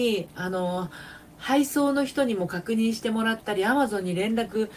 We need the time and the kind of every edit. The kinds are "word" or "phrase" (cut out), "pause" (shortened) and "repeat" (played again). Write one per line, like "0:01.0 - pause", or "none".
none

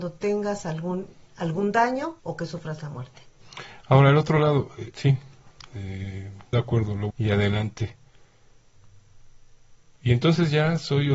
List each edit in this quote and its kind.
0:01.3 - pause
0:02.2 - pause
0:04.9 - word
0:06.5 - word
0:07.1 - phrase

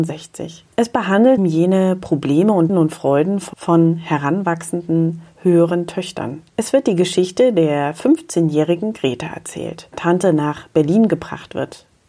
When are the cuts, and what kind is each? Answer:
0:01.4 - word
0:02.7 - word
0:09.9 - phrase

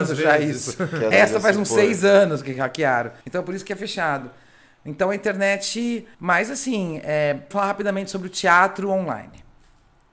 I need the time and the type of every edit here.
0:01.1 - word
0:03.2 - pause
0:06.1 - pause
0:07.5 - phrase

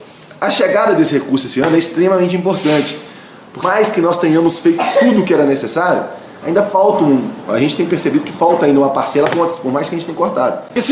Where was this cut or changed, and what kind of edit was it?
0:03.6 - word
0:09.3 - phrase

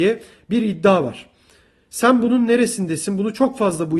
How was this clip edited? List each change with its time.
none

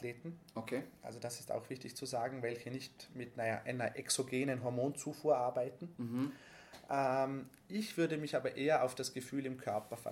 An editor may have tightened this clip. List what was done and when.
none

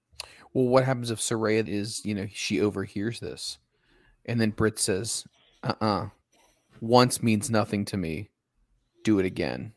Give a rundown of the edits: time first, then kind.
0:01.7 - word

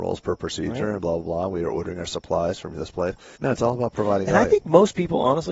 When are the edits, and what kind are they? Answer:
0:03.4 - pause

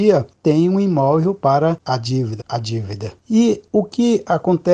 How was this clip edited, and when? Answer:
0:01.8 - word
0:02.4 - word

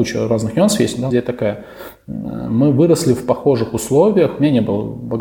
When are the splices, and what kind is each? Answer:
0:01.1 - phrase

